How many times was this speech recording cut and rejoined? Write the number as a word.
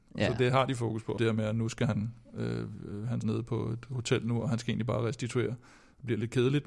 two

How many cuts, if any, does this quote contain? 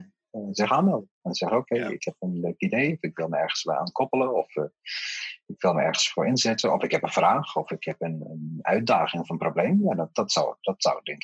zero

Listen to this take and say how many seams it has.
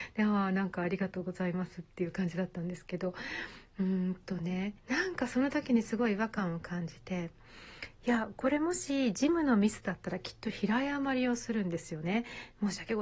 one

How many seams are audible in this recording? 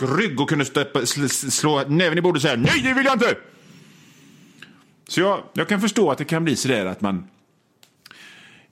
zero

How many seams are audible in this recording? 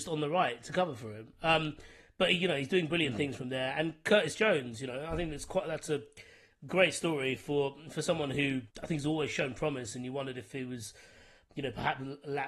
one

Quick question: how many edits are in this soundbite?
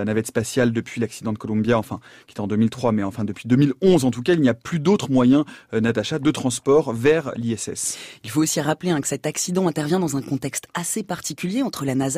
zero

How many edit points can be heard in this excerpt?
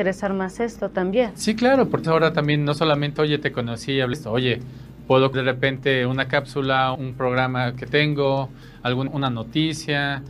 six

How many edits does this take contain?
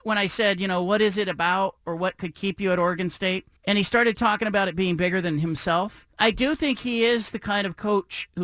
two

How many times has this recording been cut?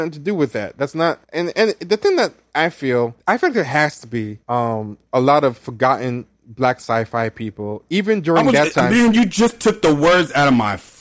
three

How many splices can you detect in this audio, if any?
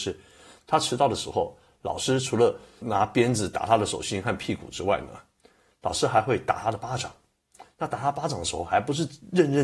one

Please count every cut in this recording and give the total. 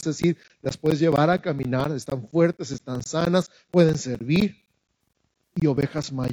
zero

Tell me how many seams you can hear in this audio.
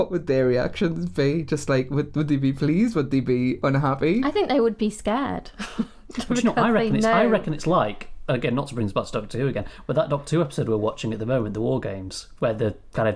zero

